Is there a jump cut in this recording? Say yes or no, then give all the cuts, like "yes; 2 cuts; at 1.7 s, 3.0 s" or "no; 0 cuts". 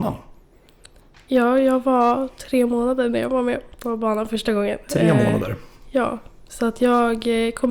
no; 0 cuts